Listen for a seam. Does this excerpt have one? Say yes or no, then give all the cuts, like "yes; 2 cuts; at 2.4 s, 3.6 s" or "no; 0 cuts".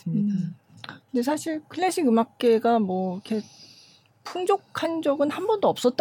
no; 0 cuts